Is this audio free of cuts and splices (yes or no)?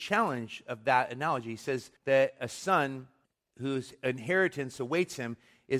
no